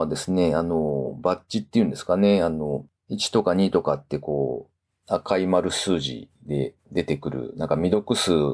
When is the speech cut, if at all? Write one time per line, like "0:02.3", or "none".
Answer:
none